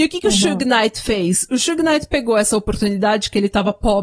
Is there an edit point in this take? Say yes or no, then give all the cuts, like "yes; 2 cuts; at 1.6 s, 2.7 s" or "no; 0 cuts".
no; 0 cuts